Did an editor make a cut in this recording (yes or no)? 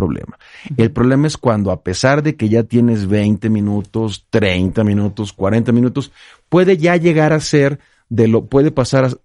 no